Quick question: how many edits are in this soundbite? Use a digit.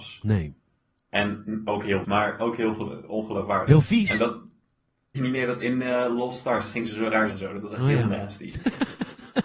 4